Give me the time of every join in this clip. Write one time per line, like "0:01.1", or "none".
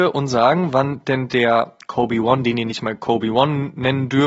none